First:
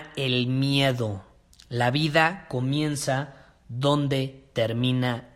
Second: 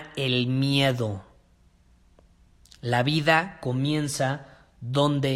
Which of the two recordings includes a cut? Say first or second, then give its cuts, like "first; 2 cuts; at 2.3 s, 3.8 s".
first; 1 cut; at 1.5 s